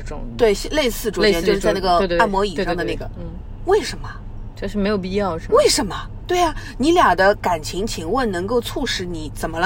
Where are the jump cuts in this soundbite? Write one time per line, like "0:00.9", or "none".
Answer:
none